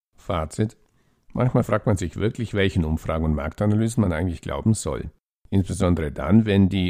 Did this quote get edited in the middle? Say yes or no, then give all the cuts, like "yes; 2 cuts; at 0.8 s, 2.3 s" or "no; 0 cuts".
no; 0 cuts